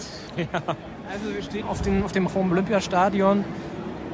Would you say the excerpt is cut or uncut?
cut